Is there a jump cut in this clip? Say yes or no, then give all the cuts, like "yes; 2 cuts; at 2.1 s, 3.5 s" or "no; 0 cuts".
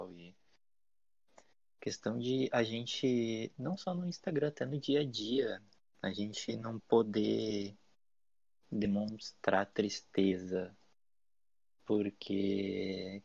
no; 0 cuts